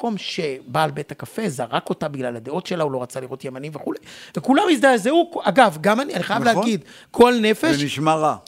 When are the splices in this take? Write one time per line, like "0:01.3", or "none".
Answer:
none